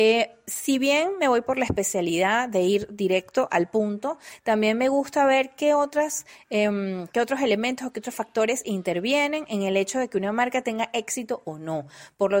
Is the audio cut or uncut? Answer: uncut